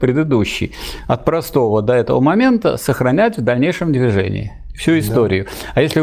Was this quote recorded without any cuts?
yes; 0 cuts

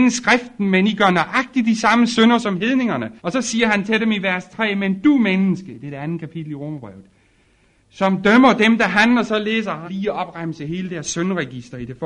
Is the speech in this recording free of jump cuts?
no; 2 cuts; at 3.2 s, 9.9 s

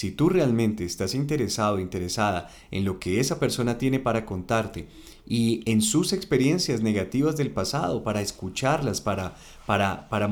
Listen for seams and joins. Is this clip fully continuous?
yes; 0 cuts

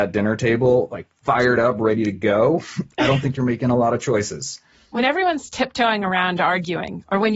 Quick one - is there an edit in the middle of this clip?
no; 0 cuts

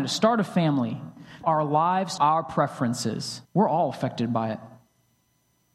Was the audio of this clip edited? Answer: yes; 3 cuts; at 1.4 s, 2.2 s, 3.4 s

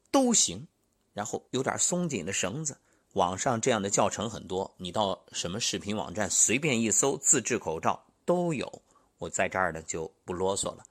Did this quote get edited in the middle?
yes; 2 cuts; at 1.5 s, 2.9 s

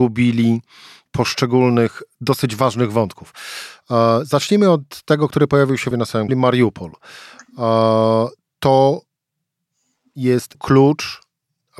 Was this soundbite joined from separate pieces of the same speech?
yes; 3 cuts; at 5.9 s, 6.3 s, 10.5 s

